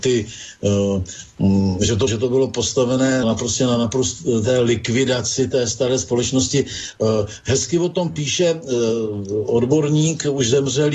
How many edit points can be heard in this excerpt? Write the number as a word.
two